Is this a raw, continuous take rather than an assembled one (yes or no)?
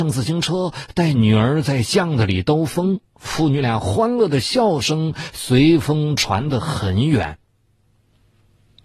no